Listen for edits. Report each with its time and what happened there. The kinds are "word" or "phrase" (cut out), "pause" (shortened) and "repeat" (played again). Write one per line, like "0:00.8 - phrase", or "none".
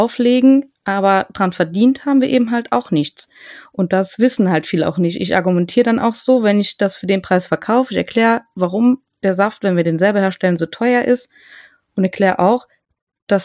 none